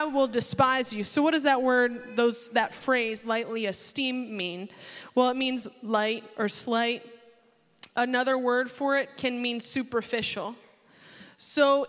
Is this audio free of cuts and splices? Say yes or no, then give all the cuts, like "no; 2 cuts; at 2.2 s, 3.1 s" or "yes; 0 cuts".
yes; 0 cuts